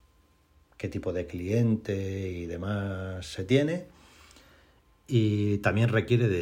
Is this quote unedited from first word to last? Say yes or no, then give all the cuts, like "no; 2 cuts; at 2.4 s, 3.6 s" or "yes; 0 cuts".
yes; 0 cuts